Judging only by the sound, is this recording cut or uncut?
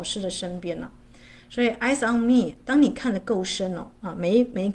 uncut